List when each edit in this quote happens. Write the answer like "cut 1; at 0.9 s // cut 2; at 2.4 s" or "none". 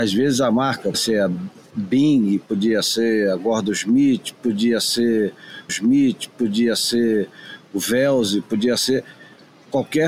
cut 1; at 0.9 s // cut 2; at 5.7 s